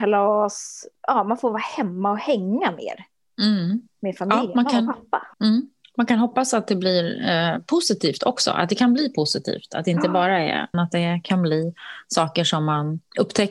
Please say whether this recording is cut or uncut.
cut